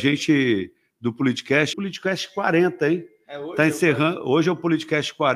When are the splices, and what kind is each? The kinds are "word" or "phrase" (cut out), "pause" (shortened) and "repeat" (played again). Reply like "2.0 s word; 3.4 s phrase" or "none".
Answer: 1.7 s word